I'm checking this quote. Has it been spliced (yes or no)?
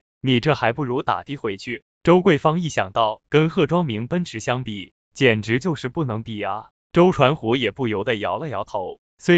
yes